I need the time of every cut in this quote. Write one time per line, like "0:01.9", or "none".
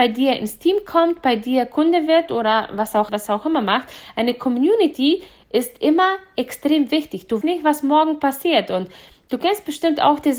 0:03.1
0:07.4